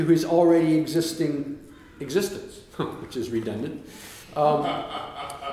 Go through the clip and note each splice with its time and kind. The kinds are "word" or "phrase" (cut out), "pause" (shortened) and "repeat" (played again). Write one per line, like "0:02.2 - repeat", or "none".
0:04.2 - pause